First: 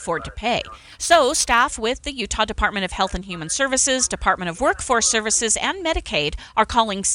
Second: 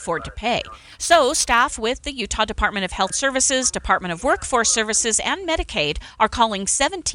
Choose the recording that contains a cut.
second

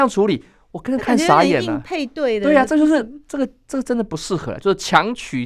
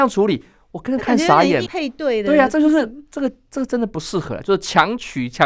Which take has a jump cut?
second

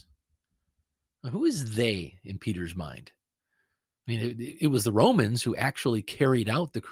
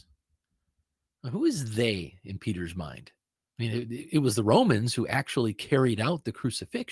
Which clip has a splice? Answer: second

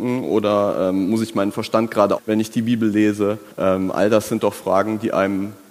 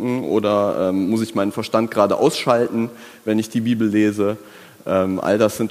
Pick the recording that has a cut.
first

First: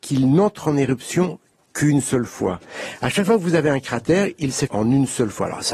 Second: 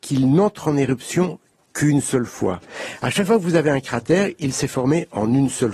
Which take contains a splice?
first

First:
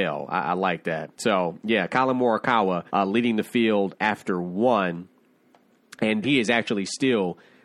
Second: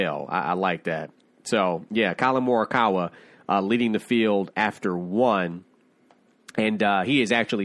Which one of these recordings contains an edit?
first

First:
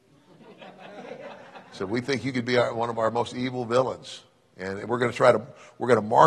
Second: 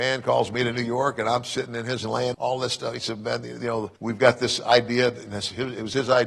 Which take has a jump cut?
second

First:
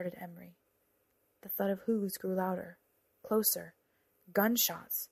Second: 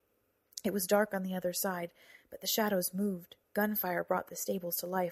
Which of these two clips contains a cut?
second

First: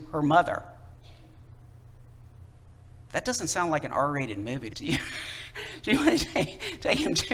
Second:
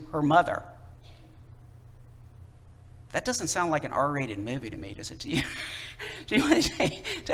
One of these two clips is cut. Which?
first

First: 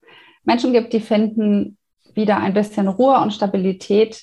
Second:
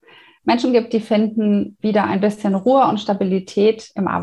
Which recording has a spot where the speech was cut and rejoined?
second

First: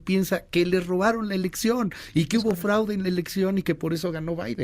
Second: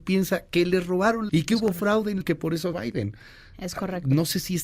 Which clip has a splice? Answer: second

